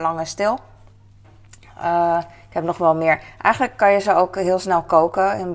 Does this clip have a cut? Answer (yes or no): no